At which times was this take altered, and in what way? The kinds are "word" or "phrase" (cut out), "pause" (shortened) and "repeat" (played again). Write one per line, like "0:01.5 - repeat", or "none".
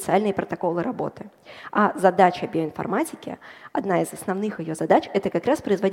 none